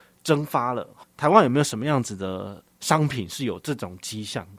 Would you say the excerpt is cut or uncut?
cut